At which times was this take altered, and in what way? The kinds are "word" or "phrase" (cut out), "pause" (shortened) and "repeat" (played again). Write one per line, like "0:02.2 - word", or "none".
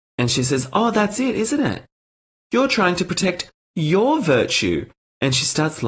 none